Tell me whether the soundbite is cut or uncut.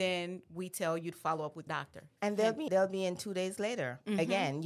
cut